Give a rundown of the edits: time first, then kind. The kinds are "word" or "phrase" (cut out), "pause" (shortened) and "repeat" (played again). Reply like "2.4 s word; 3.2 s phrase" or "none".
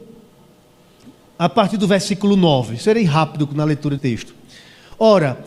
4.0 s word